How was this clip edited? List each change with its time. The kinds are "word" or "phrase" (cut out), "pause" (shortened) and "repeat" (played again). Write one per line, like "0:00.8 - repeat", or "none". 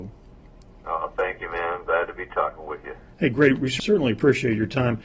none